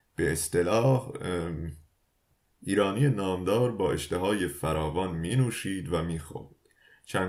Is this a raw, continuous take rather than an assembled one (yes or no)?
yes